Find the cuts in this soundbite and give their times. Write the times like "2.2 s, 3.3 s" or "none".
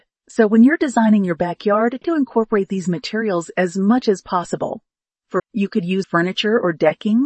2.0 s, 5.4 s, 6.0 s